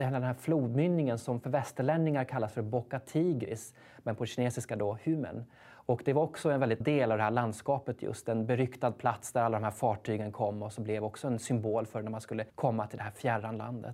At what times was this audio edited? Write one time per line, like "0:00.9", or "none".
0:06.8
0:12.5